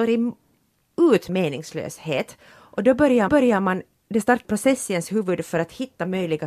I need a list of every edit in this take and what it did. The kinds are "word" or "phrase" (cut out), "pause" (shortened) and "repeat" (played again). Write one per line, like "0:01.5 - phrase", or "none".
0:01.3 - word
0:03.3 - repeat
0:04.4 - word

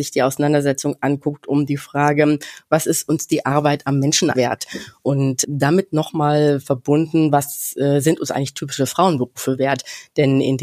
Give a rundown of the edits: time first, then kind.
0:04.3 - word

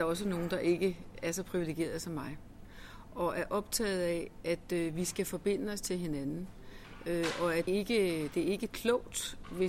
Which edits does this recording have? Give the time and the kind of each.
0:07.7 - phrase

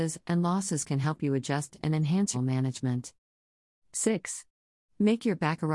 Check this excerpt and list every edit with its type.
0:02.3 - phrase

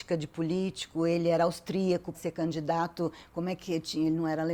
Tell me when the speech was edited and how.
0:02.1 - word

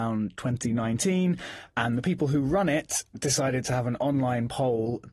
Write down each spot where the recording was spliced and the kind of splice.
none

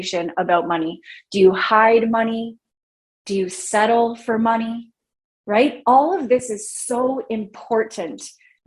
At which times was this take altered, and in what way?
none

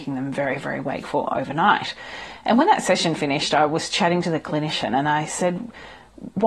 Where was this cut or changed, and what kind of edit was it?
none

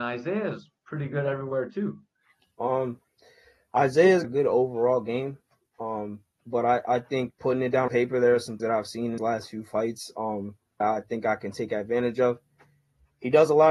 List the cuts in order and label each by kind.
0:04.2 - word
0:06.4 - word
0:07.3 - word
0:07.9 - word
0:08.6 - word
0:09.2 - word
0:10.8 - word

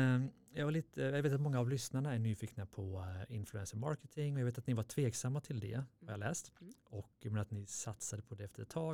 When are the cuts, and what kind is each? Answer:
none

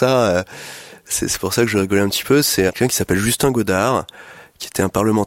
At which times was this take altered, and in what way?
0:02.7 - word

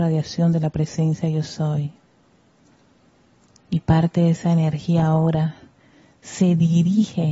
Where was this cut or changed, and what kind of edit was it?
none

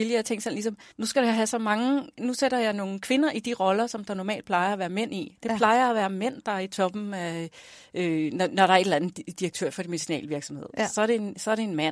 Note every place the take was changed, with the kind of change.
0:00.9 - pause

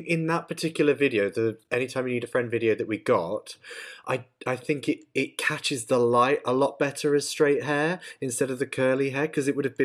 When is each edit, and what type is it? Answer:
none

